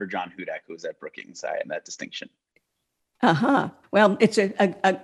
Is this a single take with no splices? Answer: no; 2 cuts; at 1.6 s, 3.8 s

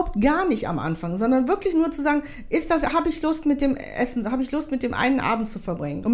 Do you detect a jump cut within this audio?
no; 0 cuts

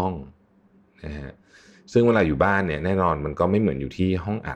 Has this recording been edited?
no; 0 cuts

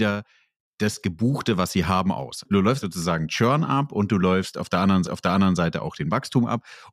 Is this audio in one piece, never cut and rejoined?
no; 2 cuts; at 2.8 s, 5.0 s

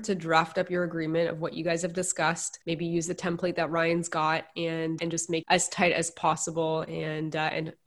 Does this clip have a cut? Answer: yes; 3 cuts; at 2.6 s, 5.0 s, 5.4 s

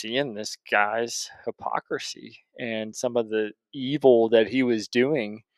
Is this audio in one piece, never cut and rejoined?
yes; 0 cuts

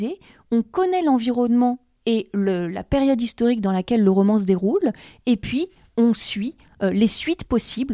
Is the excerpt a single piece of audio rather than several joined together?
yes; 0 cuts

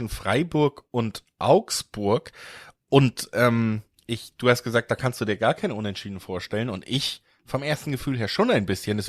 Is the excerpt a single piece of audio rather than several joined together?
yes; 0 cuts

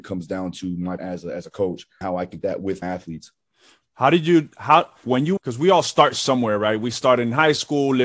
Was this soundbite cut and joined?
yes; 6 cuts; at 1.0 s, 2.0 s, 2.4 s, 2.8 s, 5.0 s, 5.4 s

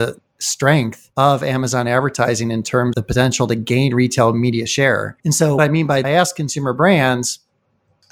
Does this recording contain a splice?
yes; 5 cuts; at 1.1 s, 2.9 s, 5.2 s, 5.6 s, 6.0 s

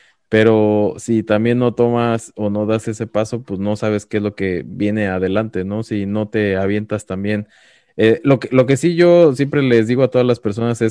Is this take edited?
no; 0 cuts

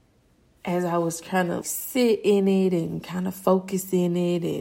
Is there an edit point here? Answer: yes; 1 cut; at 1.6 s

